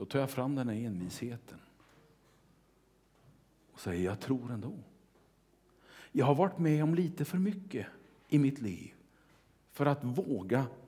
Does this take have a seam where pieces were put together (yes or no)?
no